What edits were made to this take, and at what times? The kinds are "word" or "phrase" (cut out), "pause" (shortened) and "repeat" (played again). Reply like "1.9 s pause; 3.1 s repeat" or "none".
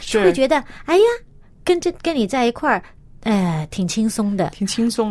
none